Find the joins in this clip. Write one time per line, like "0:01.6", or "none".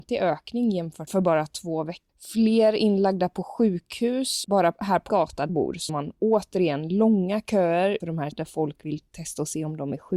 0:01.1
0:02.1
0:04.4
0:05.1
0:05.5
0:05.9
0:08.0
0:08.3